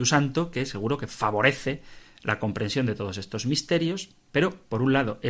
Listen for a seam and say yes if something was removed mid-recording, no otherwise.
no